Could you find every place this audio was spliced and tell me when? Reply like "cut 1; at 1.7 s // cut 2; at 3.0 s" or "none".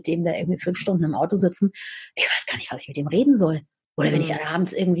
none